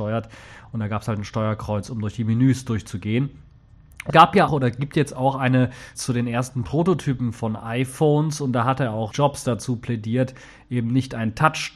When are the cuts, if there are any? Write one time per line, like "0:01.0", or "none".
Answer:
0:04.1
0:04.5
0:06.0
0:09.1

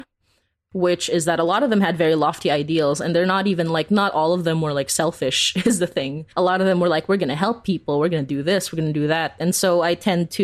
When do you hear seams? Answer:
0:06.3

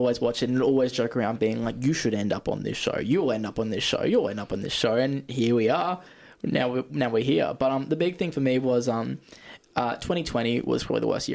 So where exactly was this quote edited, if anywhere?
none

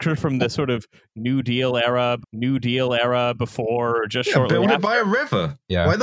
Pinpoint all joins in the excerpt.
0:02.2

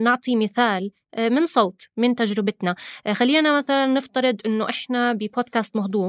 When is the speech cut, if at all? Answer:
none

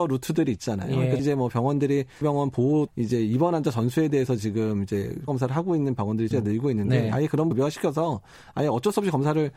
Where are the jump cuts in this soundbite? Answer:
0:01.2
0:02.2
0:02.9
0:05.3
0:06.3
0:07.5

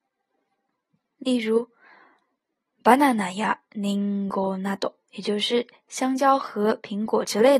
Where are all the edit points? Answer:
none

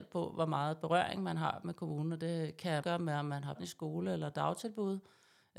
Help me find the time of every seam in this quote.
0:02.8
0:03.5

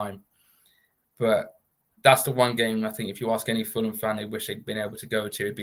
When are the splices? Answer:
none

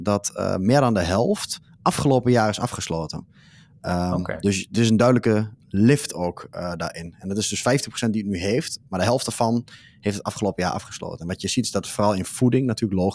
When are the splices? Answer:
none

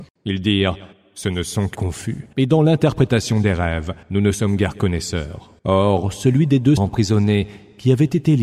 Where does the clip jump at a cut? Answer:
0:00.9
0:01.7
0:02.3
0:04.0
0:05.6
0:06.8

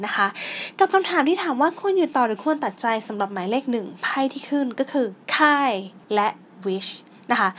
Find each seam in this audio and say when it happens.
0:05.2
0:06.0

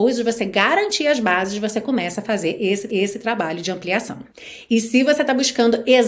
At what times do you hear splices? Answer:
0:02.9

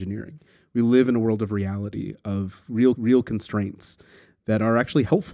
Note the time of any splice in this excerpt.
0:02.9

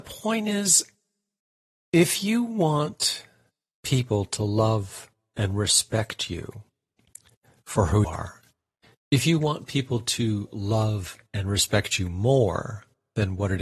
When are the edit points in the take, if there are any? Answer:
0:08.0

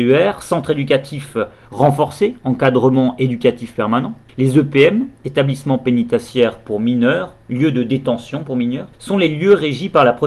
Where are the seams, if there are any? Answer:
0:04.3
0:08.9

